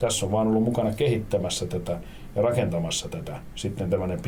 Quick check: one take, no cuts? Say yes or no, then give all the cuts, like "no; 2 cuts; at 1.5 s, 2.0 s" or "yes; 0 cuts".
yes; 0 cuts